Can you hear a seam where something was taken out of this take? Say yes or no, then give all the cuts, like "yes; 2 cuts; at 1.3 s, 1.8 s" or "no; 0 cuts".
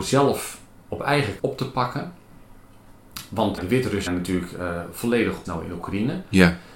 yes; 4 cuts; at 1.4 s, 3.6 s, 4.1 s, 5.4 s